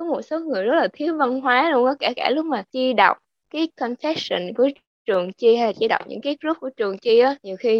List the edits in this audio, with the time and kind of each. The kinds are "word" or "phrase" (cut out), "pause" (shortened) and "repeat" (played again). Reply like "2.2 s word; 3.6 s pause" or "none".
none